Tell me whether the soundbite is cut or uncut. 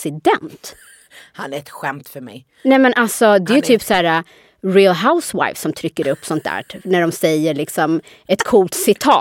uncut